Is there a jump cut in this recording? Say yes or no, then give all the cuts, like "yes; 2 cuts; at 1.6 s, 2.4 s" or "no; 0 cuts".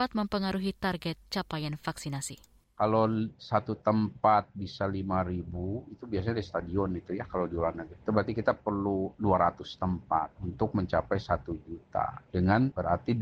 no; 0 cuts